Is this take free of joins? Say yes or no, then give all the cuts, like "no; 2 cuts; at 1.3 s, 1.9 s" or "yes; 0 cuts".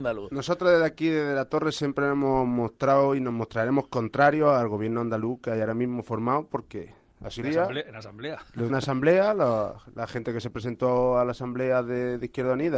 no; 2 cuts; at 7.4 s, 8.7 s